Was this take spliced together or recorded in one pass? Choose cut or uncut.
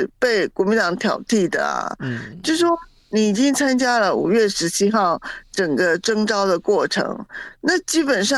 uncut